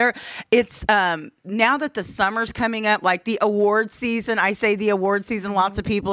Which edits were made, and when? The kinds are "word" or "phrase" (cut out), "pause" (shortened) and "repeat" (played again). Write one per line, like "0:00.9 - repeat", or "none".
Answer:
0:01.4 - pause